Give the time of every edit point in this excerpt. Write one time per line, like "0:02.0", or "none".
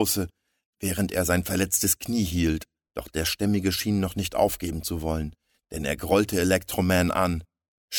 none